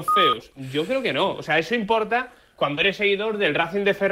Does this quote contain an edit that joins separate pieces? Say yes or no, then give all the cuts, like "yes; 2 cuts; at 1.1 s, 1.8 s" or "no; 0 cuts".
no; 0 cuts